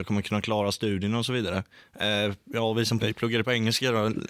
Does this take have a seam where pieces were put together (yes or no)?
yes